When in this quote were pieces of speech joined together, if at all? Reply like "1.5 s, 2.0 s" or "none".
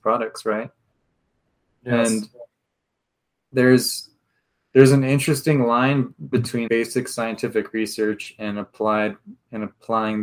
6.3 s, 6.7 s